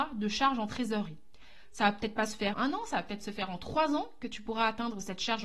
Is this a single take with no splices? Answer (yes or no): no